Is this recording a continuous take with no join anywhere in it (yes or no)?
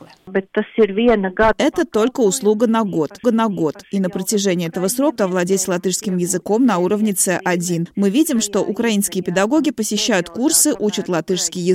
no